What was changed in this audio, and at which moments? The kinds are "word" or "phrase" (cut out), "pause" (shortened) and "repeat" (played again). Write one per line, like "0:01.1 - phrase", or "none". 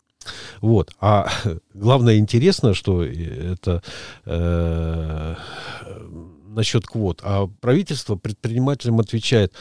0:07.6 - pause